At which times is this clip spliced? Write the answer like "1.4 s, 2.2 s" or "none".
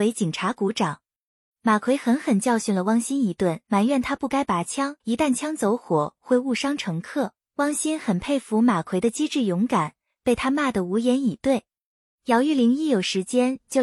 3.6 s, 5.0 s